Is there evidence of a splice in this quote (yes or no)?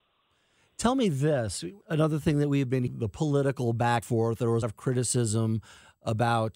yes